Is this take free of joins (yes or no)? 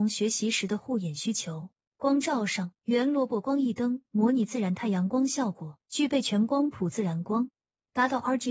no